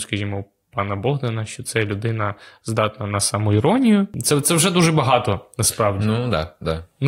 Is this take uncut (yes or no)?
yes